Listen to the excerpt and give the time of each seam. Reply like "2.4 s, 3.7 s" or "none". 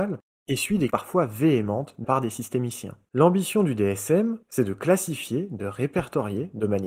0.9 s, 2.0 s, 3.0 s, 4.4 s

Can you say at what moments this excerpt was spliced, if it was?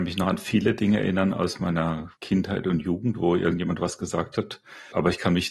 2.2 s

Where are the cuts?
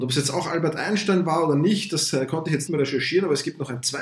2.7 s

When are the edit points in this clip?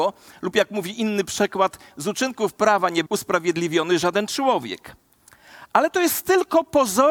3.1 s

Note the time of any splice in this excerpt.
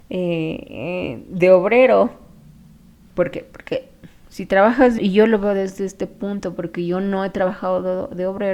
5.0 s

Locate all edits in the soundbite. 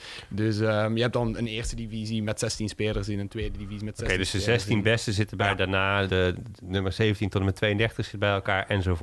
5.4 s, 6.1 s

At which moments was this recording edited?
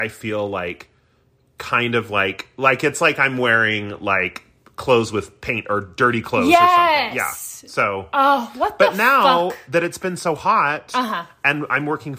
none

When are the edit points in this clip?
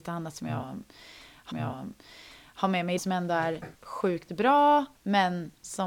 1.5 s, 3.0 s, 3.7 s, 5.0 s

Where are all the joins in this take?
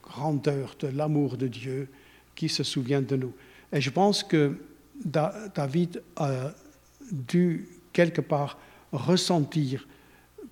none

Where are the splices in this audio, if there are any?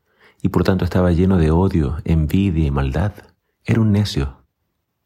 3.4 s

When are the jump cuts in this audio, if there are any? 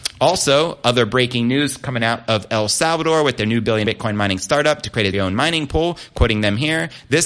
3.8 s, 5.1 s

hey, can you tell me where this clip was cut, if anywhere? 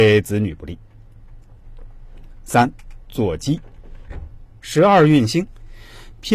none

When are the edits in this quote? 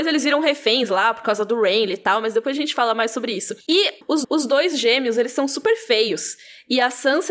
3.6 s, 4.2 s

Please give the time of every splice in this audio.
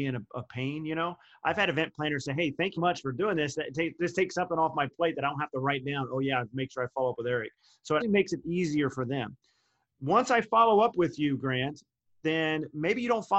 2.8 s, 8.0 s

